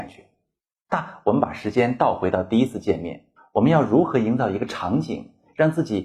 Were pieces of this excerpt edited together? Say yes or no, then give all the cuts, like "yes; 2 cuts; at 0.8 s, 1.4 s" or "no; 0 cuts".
yes; 1 cut; at 3.4 s